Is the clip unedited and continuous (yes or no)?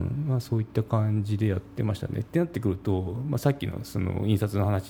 yes